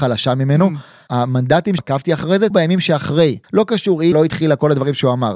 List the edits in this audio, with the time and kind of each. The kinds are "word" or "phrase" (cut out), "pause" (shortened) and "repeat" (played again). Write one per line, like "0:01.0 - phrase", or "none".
0:01.8 - word
0:02.5 - word
0:03.4 - pause
0:04.1 - word